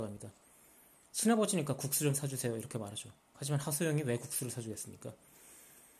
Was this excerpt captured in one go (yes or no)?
yes